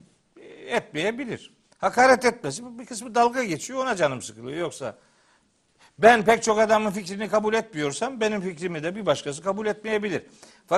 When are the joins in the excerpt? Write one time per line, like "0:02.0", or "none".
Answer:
none